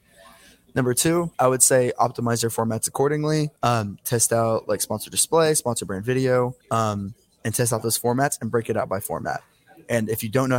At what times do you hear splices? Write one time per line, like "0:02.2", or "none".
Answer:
0:01.3
0:03.6
0:06.6

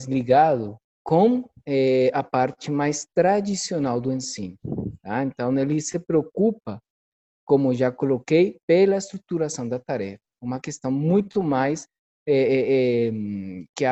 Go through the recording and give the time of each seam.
0:00.9

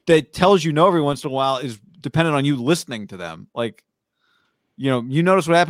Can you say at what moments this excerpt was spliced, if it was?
0:01.9

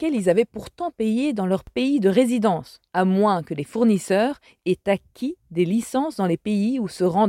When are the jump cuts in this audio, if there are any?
0:02.9

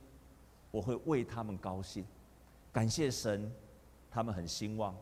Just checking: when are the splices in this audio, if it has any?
0:02.6

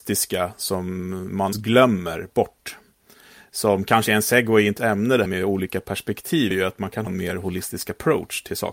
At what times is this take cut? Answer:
0:01.5
0:04.8
0:05.3
0:06.5
0:07.1

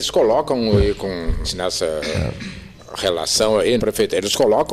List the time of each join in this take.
0:01.4
0:03.8

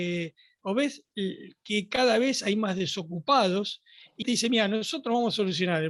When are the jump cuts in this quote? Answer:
0:04.2

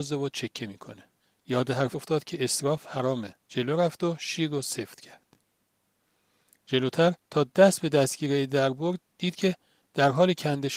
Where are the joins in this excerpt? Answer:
0:01.2
0:01.9
0:03.4
0:07.2

